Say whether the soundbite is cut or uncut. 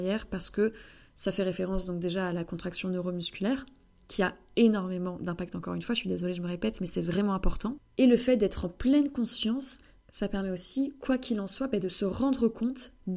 uncut